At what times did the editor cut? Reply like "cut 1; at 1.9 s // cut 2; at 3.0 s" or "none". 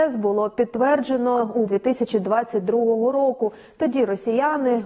cut 1; at 1.7 s